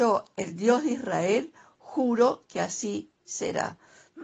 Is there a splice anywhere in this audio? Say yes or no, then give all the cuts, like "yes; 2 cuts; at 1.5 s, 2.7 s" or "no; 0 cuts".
no; 0 cuts